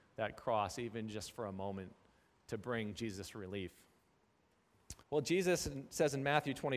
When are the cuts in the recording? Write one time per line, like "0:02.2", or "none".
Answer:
0:05.0